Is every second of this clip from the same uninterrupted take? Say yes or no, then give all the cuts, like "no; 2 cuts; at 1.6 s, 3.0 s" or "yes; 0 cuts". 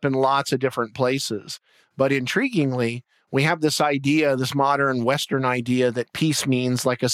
yes; 0 cuts